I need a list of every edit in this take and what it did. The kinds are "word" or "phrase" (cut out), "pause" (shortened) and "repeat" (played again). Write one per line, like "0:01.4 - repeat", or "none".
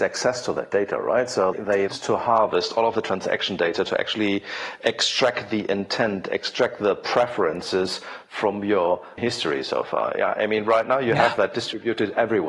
0:01.5 - word
0:01.9 - phrase
0:09.2 - phrase